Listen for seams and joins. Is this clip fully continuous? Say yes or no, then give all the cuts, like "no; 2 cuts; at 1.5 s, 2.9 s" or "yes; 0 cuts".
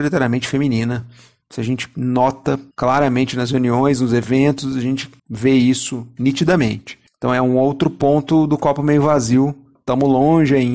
no; 2 cuts; at 2.7 s, 5.2 s